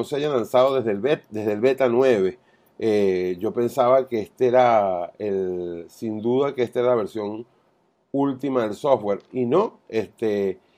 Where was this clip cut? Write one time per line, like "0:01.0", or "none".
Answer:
none